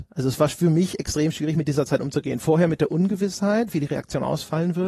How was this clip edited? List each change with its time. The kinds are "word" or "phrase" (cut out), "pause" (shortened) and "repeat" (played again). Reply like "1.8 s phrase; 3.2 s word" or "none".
none